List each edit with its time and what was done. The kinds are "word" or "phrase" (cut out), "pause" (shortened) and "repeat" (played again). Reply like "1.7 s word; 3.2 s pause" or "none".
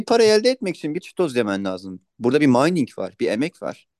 1.0 s word